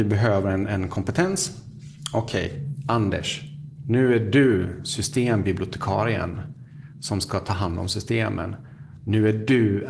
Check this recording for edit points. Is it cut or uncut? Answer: uncut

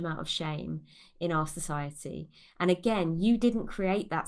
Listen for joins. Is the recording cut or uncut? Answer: uncut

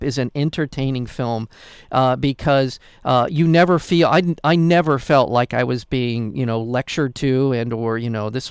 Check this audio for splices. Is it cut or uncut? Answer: uncut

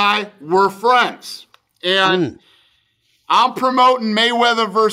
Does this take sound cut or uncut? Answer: uncut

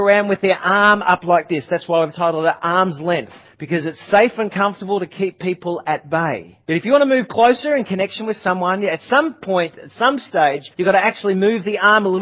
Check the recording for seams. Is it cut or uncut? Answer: cut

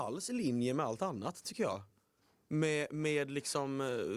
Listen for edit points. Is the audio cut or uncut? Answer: uncut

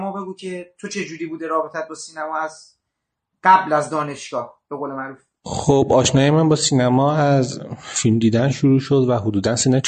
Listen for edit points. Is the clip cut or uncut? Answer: uncut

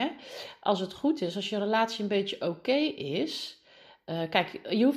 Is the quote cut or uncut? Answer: uncut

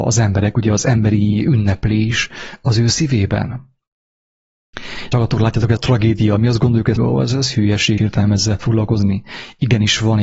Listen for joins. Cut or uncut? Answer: cut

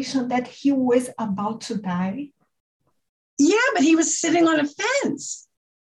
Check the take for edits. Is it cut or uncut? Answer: uncut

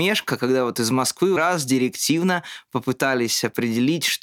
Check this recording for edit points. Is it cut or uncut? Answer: cut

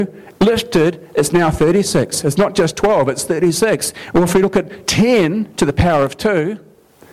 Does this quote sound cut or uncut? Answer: uncut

